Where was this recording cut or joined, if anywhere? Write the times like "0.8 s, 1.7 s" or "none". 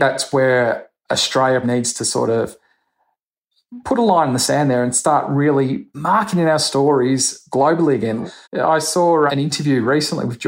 1.6 s, 5.9 s, 8.4 s, 9.3 s

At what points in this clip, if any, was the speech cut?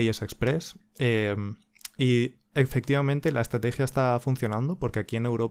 2.5 s

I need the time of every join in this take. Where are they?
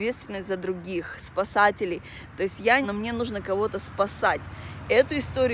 2.8 s

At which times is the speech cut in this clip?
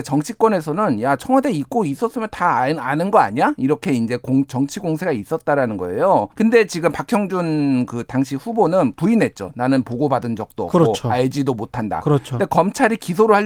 6.3 s

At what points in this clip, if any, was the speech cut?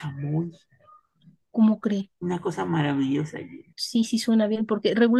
3.7 s

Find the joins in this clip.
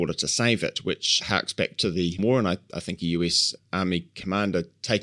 2.2 s

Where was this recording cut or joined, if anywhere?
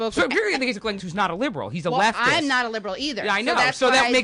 1.0 s

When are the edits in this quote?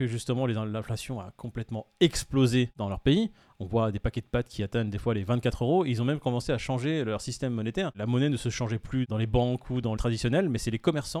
10.0 s

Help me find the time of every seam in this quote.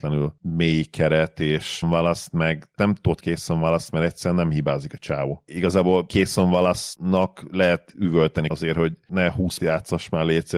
1.8 s, 3.2 s, 8.5 s, 9.6 s

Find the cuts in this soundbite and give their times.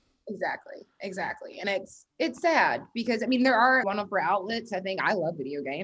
2.1 s, 3.8 s

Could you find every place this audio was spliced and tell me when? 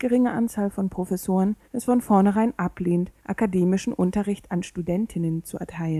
1.6 s, 3.2 s

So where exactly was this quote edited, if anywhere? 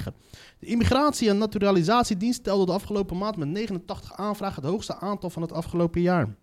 none

